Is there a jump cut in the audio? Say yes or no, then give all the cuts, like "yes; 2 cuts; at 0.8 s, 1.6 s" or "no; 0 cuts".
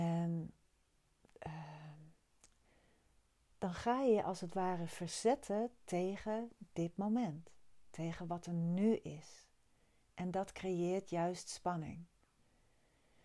no; 0 cuts